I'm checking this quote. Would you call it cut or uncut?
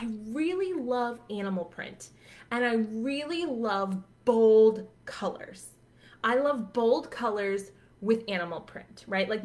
uncut